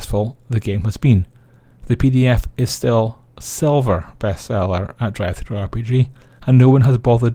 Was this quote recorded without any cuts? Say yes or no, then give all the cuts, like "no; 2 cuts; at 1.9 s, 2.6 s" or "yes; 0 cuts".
yes; 0 cuts